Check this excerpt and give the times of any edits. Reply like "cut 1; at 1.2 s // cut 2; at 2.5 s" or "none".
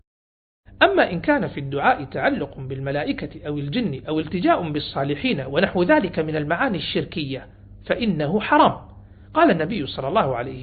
none